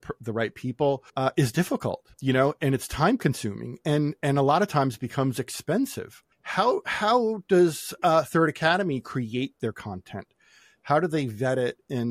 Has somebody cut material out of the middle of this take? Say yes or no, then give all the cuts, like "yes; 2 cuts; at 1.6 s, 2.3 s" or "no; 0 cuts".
yes; 3 cuts; at 1.1 s, 2.1 s, 6.3 s